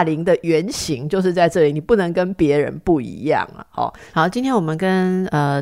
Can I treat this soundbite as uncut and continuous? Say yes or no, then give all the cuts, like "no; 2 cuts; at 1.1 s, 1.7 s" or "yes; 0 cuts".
yes; 0 cuts